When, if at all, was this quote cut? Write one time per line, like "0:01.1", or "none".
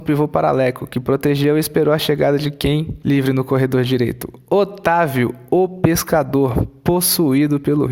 none